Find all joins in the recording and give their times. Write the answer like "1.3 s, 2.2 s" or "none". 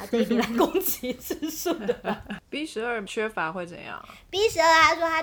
none